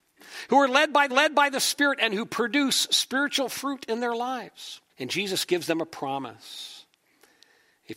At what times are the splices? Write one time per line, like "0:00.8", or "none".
0:01.1
0:04.9